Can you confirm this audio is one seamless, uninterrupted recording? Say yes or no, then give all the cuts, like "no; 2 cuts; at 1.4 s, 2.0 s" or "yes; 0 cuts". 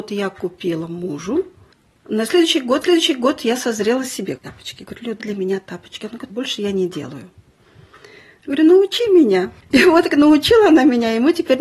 no; 6 cuts; at 2.8 s, 4.4 s, 5.2 s, 6.3 s, 9.6 s, 10.1 s